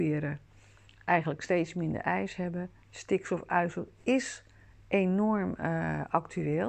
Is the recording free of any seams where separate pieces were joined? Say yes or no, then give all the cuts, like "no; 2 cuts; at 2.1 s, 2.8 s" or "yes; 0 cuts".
yes; 0 cuts